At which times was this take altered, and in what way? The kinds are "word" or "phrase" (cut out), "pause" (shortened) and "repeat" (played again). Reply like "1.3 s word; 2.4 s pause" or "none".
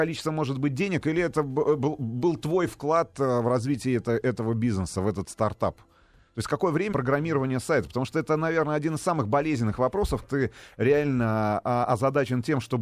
6.9 s phrase; 10.2 s word